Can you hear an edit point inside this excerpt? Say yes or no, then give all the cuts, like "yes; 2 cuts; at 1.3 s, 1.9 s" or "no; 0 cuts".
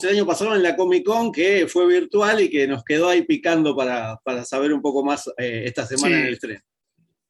no; 0 cuts